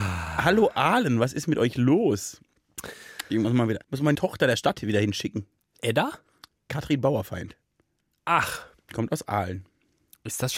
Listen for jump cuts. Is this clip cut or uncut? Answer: cut